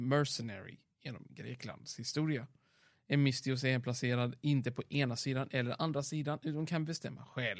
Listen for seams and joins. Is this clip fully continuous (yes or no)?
yes